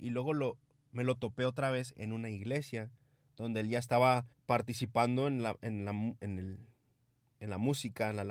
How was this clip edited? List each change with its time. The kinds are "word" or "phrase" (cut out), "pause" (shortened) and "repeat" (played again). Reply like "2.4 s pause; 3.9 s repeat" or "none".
4.3 s pause

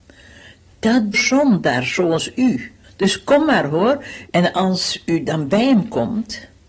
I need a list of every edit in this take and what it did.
1.1 s phrase; 2.8 s pause

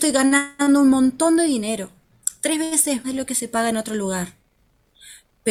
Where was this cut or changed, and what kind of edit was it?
3.0 s word

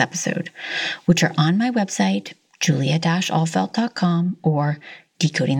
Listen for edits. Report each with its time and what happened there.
none

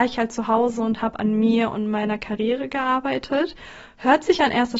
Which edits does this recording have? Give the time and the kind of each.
none

